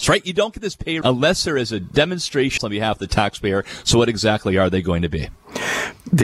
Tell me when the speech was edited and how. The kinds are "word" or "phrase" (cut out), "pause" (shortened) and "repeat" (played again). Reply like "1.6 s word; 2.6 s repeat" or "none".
1.0 s word; 2.6 s phrase